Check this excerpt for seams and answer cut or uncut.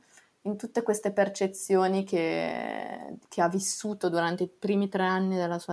cut